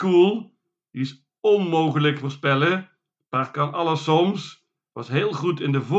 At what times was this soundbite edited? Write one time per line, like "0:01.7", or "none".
0:02.2